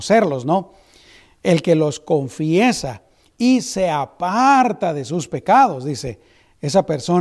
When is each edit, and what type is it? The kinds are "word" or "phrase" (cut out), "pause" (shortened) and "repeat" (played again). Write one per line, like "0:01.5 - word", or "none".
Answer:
none